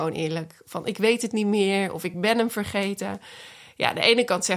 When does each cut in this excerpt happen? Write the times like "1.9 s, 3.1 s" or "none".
none